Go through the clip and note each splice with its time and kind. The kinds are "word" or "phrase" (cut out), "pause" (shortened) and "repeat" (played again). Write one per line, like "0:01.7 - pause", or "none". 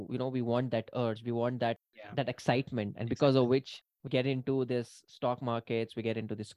0:04.1 - word